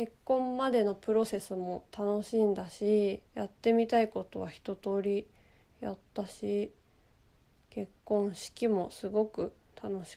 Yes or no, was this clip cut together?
yes